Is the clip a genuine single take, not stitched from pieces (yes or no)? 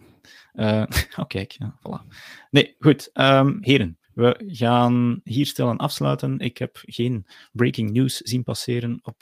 no